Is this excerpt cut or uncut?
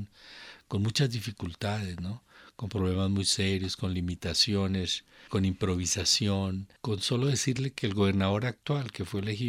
uncut